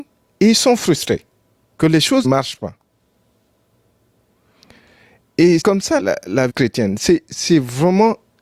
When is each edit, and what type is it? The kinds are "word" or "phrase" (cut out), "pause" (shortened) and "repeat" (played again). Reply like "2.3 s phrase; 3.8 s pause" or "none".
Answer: 1.5 s pause; 2.2 s word; 5.6 s word; 6.0 s word; 6.5 s word